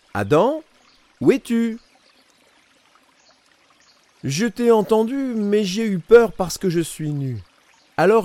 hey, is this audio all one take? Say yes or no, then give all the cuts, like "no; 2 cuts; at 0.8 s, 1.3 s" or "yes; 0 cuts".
yes; 0 cuts